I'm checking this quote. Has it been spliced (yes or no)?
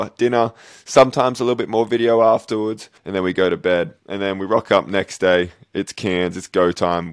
yes